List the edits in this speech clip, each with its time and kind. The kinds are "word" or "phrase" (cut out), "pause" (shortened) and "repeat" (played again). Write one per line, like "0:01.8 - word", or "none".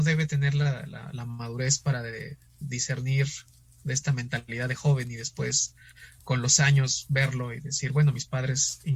none